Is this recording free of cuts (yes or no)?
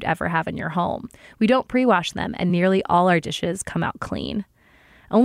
yes